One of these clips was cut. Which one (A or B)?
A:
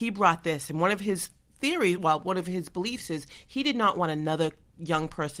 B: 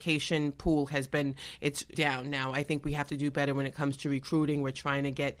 B